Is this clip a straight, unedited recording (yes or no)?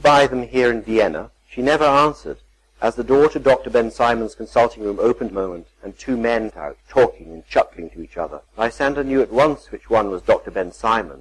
no